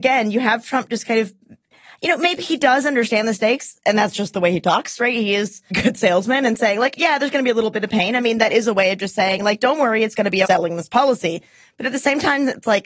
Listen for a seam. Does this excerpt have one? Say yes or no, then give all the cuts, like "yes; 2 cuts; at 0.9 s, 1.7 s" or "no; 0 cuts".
yes; 2 cuts; at 5.7 s, 10.4 s